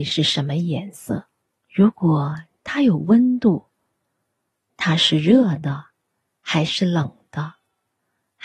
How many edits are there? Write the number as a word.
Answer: one